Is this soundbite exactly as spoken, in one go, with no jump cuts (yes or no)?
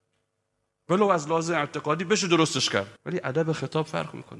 no